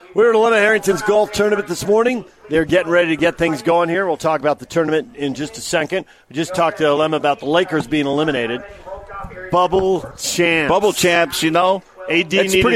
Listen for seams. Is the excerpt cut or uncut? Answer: uncut